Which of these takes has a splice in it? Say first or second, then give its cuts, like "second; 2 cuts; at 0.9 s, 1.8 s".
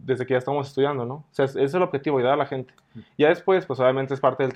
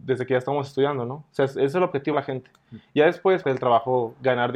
second; 2 cuts; at 2.1 s, 3.4 s